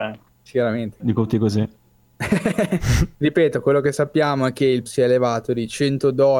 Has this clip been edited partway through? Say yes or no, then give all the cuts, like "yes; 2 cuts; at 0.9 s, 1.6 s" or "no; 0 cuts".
yes; 3 cuts; at 1.0 s, 3.1 s, 4.9 s